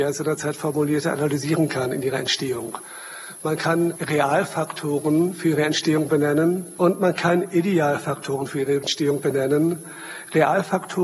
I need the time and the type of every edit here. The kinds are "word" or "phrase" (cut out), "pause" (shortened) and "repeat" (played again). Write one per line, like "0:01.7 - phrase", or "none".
none

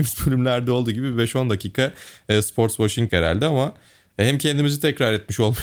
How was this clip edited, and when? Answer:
0:03.1 - word

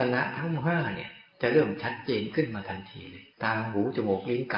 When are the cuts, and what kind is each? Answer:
0:03.3 - pause

